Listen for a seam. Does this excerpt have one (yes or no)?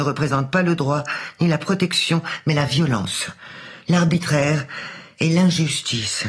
no